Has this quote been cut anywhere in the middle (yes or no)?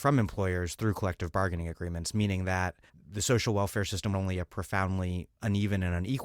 yes